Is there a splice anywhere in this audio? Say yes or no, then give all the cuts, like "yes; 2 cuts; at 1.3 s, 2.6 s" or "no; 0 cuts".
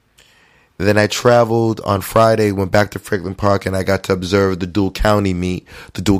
no; 0 cuts